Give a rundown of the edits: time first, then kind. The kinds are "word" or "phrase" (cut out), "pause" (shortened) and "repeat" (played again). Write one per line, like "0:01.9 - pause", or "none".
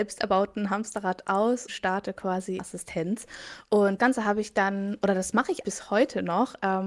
0:01.7 - word
0:02.6 - phrase
0:04.0 - word
0:05.6 - word